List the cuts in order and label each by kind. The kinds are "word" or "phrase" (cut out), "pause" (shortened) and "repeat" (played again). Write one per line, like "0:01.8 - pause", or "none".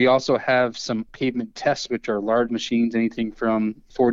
0:01.1 - word
0:01.9 - word
0:02.5 - word